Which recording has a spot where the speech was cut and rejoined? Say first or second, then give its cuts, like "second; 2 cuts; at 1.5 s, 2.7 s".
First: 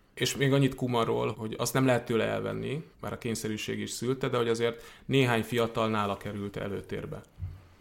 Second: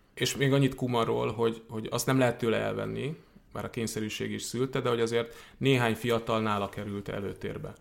first; 2 cuts; at 1.3 s, 2.9 s